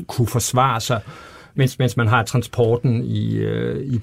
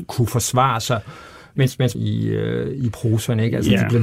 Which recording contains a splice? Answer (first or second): second